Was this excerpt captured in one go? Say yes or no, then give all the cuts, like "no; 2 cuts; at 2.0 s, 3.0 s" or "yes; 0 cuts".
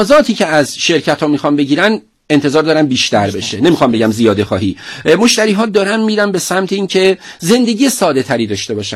yes; 0 cuts